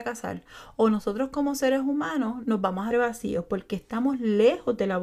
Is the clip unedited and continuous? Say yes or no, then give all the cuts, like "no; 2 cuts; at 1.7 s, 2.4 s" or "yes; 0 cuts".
no; 1 cut; at 2.9 s